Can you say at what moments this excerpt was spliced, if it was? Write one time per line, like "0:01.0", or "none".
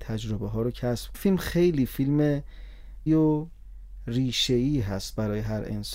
0:01.1
0:03.1

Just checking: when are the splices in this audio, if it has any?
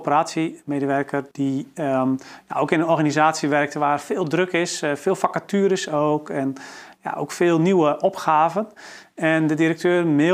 0:01.3

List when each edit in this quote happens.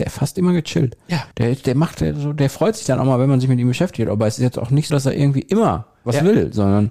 0:01.3
0:04.9

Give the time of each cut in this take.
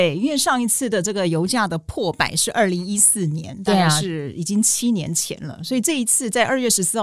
none

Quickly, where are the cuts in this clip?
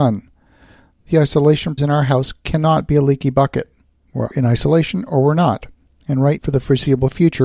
0:01.8
0:04.3
0:06.4

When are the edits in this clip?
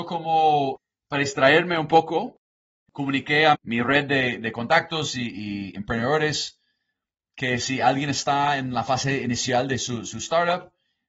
0:03.5

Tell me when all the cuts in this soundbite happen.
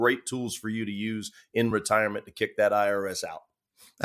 none

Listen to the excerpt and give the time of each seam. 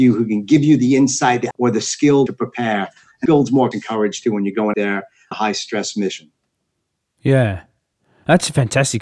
0:01.5
0:02.3
0:03.3
0:03.7
0:04.7
0:05.3

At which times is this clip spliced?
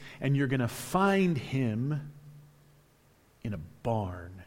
none

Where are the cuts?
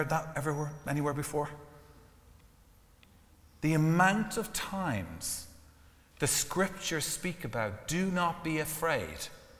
none

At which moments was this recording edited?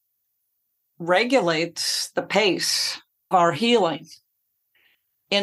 0:03.3

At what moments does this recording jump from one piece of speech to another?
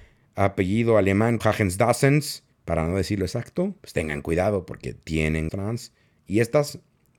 0:01.4
0:02.5
0:03.8
0:05.5

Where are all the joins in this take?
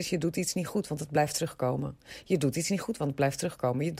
none

